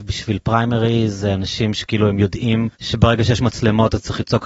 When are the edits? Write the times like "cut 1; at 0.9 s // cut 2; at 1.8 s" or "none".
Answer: cut 1; at 2.7 s